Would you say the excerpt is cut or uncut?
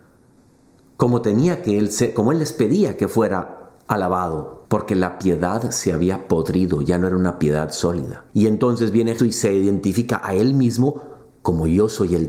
cut